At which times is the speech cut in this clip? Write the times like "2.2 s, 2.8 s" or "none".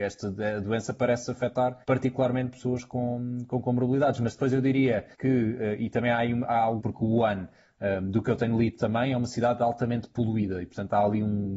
1.8 s, 5.1 s, 6.8 s